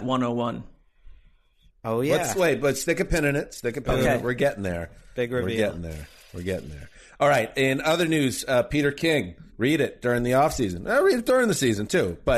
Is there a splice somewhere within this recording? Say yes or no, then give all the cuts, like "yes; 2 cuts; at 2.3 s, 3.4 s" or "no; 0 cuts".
yes; 1 cut; at 9.5 s